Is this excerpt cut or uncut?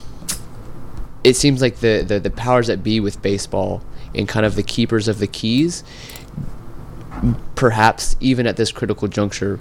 uncut